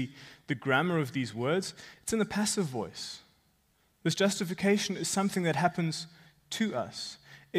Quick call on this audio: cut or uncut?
uncut